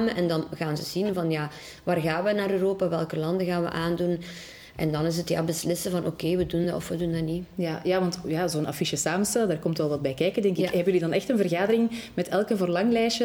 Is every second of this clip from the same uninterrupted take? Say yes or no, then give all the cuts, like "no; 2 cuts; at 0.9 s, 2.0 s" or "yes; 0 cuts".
yes; 0 cuts